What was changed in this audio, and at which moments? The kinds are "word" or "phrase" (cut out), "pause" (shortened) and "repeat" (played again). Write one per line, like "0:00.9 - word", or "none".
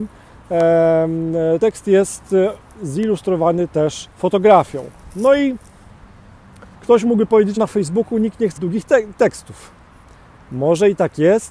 0:01.6 - word
0:04.1 - pause
0:06.7 - pause
0:07.6 - word
0:08.6 - word
0:09.1 - phrase